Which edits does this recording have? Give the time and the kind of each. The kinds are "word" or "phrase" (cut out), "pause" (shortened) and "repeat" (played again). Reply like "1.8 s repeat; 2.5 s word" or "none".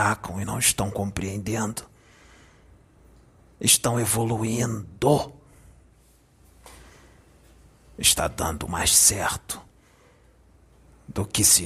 8.7 s word